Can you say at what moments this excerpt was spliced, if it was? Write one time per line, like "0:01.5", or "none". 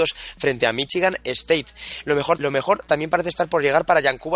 0:02.4